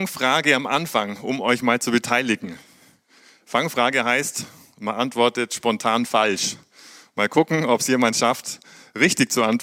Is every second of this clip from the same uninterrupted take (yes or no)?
yes